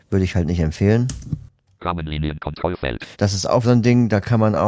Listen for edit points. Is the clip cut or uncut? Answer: cut